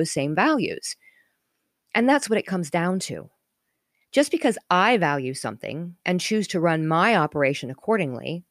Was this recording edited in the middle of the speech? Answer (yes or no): no